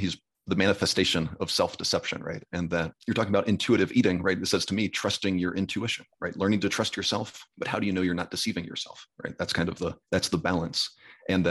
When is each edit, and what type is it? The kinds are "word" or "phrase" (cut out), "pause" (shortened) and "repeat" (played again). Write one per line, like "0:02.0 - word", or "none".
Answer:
0:03.0 - pause
0:07.5 - pause
0:10.0 - pause